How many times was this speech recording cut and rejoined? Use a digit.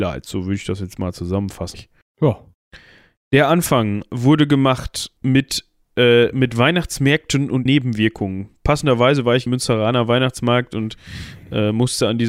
4